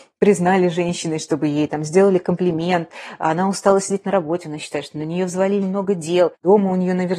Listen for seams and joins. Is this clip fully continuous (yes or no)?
no